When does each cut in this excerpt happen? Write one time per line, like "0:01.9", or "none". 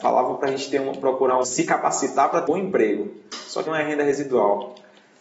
0:01.4
0:02.5
0:03.7